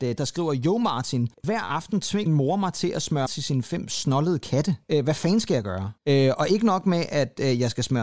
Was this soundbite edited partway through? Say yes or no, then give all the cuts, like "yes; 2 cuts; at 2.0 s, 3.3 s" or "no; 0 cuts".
yes; 5 cuts; at 1.3 s, 2.3 s, 3.3 s, 4.8 s, 6.0 s